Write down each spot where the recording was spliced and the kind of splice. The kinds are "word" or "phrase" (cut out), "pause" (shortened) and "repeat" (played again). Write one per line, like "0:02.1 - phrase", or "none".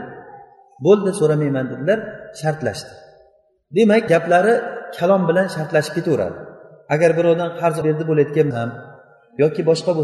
0:04.1 - word
0:07.8 - word
0:08.5 - word